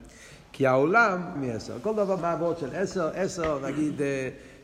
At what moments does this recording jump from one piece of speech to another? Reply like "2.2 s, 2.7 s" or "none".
1.3 s, 2.2 s